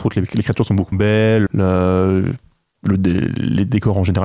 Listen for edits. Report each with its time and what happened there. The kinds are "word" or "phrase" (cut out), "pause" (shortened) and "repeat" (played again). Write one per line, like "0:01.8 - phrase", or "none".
0:00.9 - word
0:01.5 - word